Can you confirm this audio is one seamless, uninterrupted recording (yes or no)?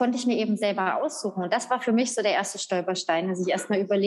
yes